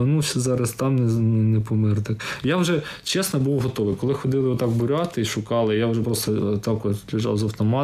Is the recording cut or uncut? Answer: uncut